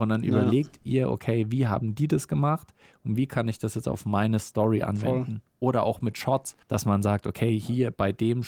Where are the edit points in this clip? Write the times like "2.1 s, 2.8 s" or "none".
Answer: 6.6 s